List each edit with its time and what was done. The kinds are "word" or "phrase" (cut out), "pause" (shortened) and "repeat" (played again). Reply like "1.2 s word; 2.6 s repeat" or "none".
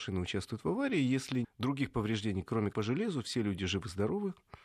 1.4 s word; 2.7 s word